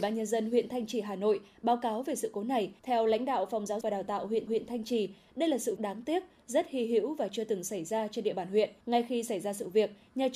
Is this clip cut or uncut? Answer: cut